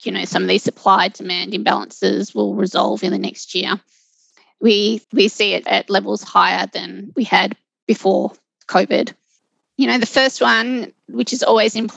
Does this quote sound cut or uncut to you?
cut